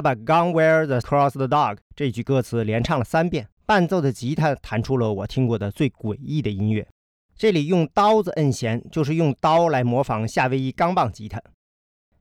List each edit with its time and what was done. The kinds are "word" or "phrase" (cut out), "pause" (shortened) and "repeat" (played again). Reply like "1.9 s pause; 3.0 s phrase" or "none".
1.0 s word; 1.8 s pause; 3.5 s pause; 7.2 s pause